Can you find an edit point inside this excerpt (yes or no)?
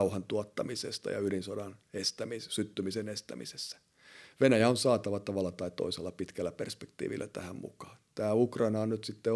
no